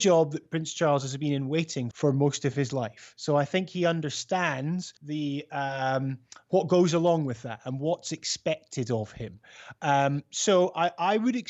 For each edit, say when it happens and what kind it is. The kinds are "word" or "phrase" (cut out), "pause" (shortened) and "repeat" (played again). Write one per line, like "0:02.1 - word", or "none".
0:01.9 - word
0:05.0 - pause